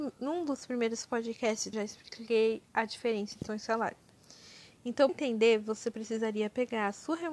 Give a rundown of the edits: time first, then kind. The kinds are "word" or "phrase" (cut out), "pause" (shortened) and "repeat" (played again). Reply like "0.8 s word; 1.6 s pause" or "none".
1.7 s word; 3.5 s word; 5.1 s word